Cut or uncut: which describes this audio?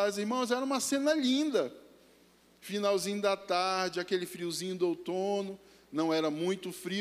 uncut